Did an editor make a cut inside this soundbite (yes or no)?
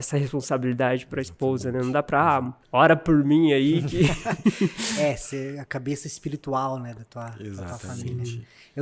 yes